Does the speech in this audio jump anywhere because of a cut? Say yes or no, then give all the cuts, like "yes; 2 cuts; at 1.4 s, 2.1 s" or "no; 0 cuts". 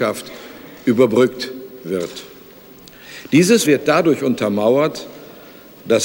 yes; 1 cut; at 3.6 s